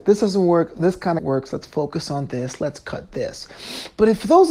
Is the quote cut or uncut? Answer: cut